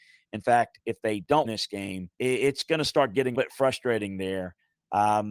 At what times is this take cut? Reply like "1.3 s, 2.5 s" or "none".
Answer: 1.4 s, 2.1 s, 3.3 s